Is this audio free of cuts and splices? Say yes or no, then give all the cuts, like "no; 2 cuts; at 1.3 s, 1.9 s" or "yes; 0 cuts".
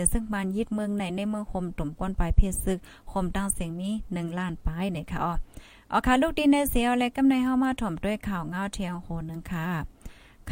yes; 0 cuts